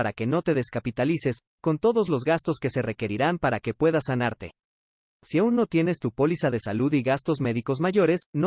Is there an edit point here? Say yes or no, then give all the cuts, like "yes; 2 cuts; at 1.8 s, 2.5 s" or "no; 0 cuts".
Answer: no; 0 cuts